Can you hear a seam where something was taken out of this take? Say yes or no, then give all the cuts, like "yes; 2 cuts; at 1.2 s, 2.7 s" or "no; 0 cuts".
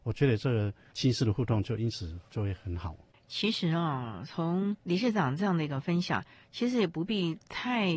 no; 0 cuts